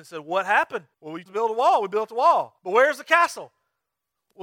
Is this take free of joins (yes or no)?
no